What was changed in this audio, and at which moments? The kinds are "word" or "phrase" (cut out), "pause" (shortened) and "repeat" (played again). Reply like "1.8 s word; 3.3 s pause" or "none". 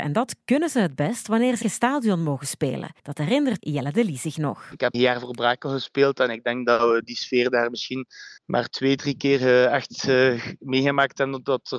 1.6 s phrase; 3.0 s pause; 3.6 s word; 4.9 s word; 8.4 s pause